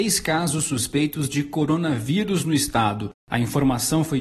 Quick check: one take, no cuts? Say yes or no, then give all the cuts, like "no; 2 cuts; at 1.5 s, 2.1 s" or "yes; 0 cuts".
yes; 0 cuts